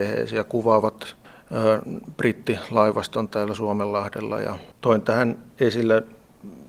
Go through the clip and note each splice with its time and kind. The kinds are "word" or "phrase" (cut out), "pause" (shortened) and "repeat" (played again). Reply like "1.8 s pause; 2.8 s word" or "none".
3.3 s word; 4.7 s pause